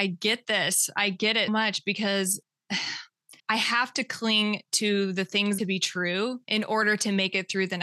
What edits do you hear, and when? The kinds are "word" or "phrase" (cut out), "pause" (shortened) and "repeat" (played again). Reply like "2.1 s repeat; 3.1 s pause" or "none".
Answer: 1.5 s word; 3.4 s pause; 5.6 s phrase; 6.4 s pause

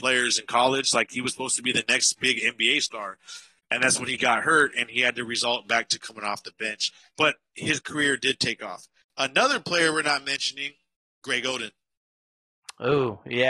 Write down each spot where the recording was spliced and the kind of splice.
none

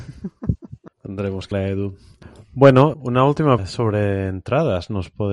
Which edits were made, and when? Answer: 0.9 s pause; 1.5 s word; 2.9 s word; 3.6 s word

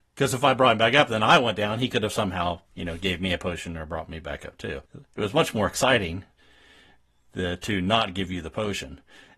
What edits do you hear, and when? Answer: 2.7 s pause; 4.9 s pause

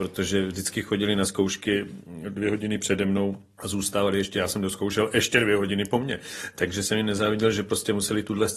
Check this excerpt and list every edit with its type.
none

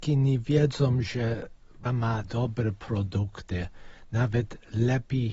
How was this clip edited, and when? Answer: 1.9 s word; 2.2 s word

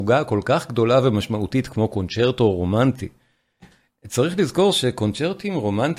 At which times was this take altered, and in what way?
none

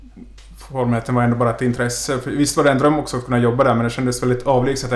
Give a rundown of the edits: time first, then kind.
none

